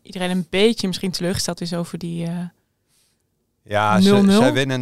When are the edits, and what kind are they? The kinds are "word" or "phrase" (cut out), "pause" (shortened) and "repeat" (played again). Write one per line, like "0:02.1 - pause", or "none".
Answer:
none